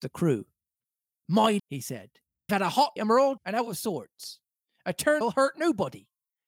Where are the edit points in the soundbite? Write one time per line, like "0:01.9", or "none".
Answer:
0:01.6
0:02.5
0:03.0
0:03.4
0:05.2